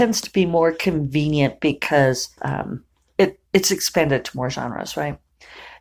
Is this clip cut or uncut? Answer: cut